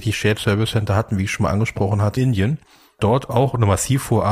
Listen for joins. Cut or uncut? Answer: cut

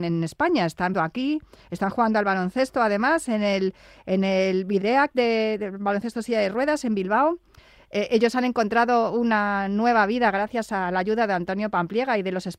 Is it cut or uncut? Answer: cut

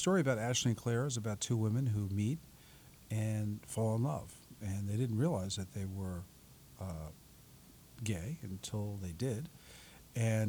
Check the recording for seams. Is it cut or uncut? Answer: uncut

